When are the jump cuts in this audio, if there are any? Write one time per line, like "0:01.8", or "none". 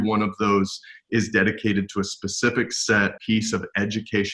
0:03.2